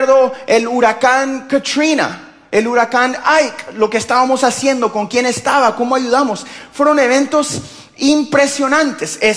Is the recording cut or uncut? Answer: uncut